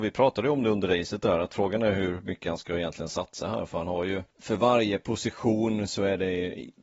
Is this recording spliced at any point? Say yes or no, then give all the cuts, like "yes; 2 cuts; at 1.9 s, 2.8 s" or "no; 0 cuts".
yes; 1 cut; at 4.3 s